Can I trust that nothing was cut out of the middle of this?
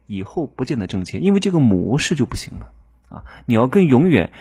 yes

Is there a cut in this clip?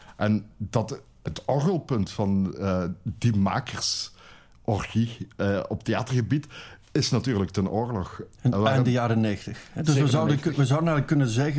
yes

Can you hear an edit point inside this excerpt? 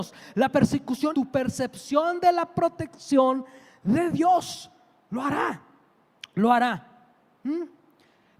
yes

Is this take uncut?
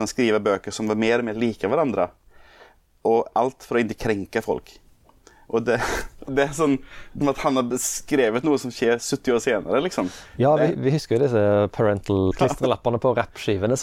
no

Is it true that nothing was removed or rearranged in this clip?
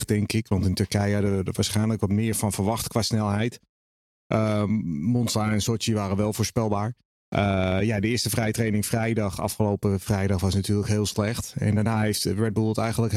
yes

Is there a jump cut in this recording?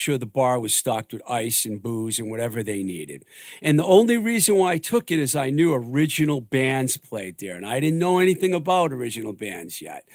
no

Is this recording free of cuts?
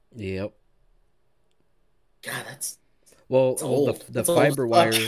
yes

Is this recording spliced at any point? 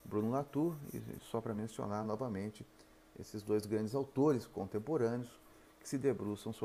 no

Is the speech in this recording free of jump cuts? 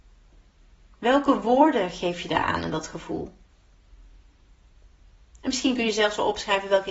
yes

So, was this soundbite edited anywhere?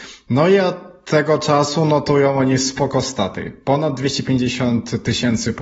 no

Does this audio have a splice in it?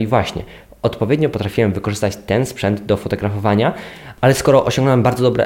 no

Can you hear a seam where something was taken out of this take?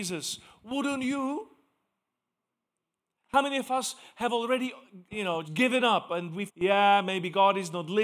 yes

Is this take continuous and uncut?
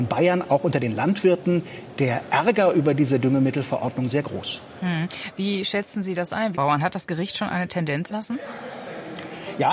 no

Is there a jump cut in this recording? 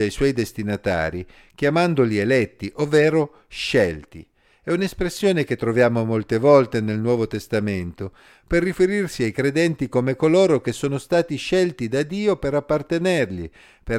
no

